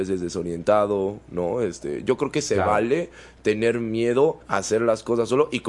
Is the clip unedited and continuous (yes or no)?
no